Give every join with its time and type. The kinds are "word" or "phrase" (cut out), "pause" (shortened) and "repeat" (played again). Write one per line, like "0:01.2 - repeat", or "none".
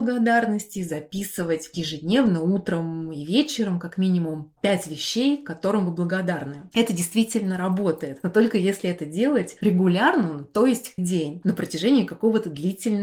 0:11.0 - word